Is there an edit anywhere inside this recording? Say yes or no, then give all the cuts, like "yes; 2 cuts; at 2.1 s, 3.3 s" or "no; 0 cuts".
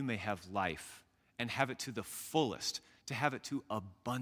no; 0 cuts